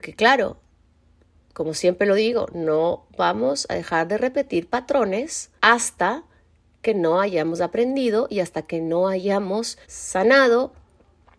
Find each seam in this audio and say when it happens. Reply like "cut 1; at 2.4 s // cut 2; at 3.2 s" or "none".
cut 1; at 5.6 s // cut 2; at 9.8 s